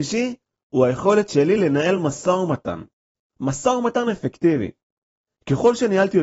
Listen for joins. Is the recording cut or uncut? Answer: uncut